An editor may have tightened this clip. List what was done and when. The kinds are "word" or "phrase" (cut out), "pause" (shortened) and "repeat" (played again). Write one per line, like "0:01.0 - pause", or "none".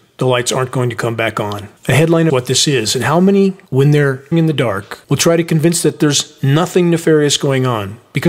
0:01.8 - pause
0:02.3 - phrase
0:03.7 - pause
0:04.3 - word
0:05.0 - pause
0:05.8 - word

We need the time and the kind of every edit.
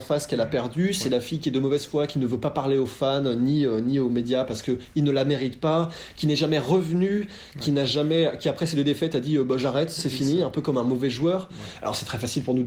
0:10.0 - word

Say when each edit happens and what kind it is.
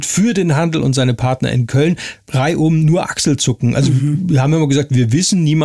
0:02.2 - pause

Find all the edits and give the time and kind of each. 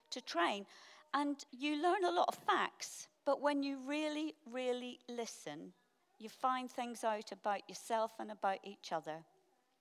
0:01.5 - pause
0:03.2 - pause
0:06.0 - pause

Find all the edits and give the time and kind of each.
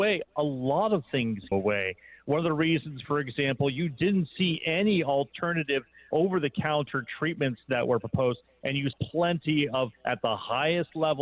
0:01.5 - word
0:06.1 - word
0:08.9 - word
0:09.9 - word

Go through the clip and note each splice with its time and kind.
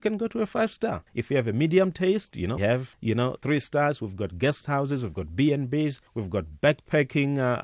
0:01.1 - pause
0:02.6 - word
0:02.9 - word
0:03.4 - word
0:06.1 - pause

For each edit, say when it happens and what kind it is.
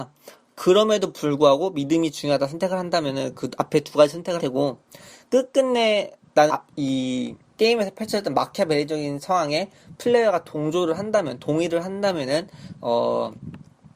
0:04.4 - word
0:06.5 - phrase
0:07.5 - pause

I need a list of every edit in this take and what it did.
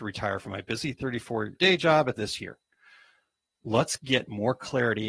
0:01.5 - word
0:02.2 - phrase

